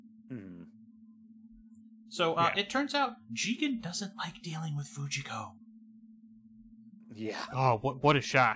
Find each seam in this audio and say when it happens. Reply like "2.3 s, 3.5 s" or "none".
none